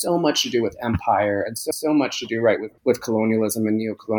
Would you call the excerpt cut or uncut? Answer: cut